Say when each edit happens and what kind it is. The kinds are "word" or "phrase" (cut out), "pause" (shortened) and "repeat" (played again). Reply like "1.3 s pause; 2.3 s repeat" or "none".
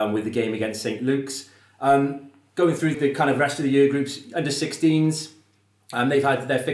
2.9 s word